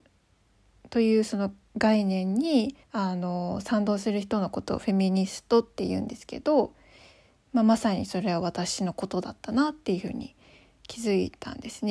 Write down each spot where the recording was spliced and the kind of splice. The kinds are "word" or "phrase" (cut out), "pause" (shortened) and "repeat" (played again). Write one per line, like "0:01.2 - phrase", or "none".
0:02.8 - pause